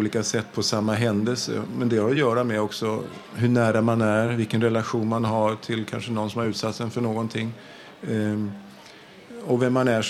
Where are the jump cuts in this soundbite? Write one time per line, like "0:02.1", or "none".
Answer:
none